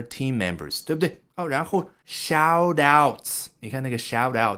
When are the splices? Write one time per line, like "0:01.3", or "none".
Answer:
0:01.3
0:02.0